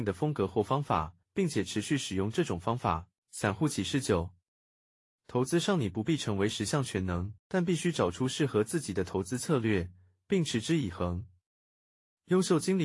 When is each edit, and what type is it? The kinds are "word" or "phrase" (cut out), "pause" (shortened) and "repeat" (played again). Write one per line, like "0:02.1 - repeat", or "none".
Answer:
0:01.2 - pause
0:03.2 - pause
0:07.4 - pause